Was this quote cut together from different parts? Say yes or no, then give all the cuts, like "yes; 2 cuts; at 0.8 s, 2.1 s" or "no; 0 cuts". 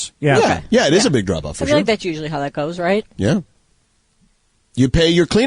no; 0 cuts